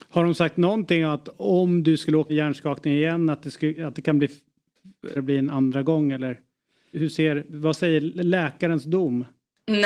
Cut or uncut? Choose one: cut